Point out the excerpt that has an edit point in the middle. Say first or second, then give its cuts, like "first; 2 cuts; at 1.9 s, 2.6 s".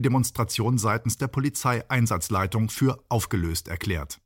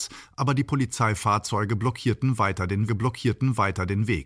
second; 1 cut; at 2.9 s